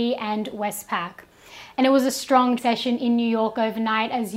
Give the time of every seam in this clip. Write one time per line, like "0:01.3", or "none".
0:02.6